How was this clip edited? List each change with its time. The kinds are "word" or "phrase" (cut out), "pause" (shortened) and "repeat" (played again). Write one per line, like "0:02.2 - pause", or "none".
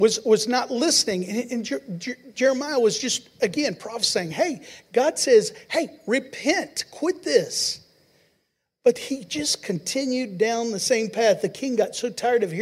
none